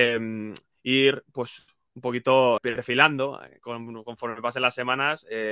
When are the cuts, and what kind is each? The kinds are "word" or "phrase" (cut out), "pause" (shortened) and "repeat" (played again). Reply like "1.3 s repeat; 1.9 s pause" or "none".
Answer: 2.6 s word